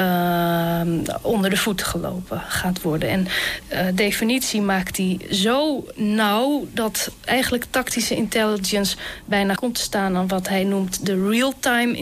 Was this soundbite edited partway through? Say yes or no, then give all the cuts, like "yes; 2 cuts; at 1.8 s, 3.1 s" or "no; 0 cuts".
yes; 3 cuts; at 3.6 s, 7.3 s, 9.6 s